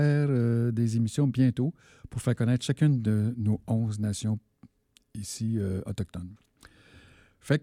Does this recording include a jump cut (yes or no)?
no